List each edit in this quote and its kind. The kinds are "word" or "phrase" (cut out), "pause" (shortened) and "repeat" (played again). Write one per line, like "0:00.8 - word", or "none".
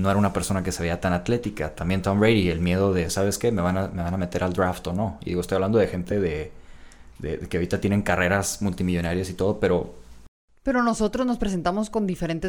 none

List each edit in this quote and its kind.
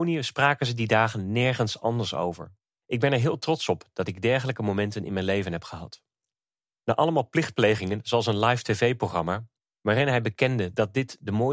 none

